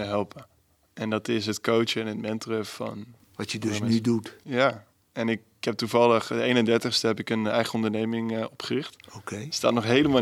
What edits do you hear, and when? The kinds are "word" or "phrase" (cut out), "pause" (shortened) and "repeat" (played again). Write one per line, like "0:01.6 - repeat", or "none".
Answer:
0:09.0 - pause

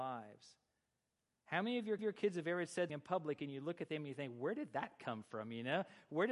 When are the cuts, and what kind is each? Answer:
0:02.0 - repeat
0:02.9 - word

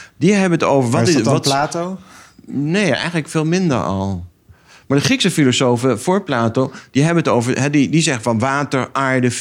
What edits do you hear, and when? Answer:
none

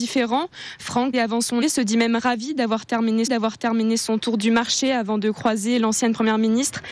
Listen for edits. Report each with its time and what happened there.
0:01.1 - word
0:01.6 - word
0:03.3 - repeat

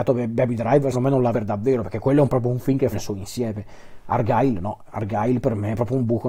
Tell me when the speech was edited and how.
0:00.9 - word
0:01.3 - word
0:02.9 - word

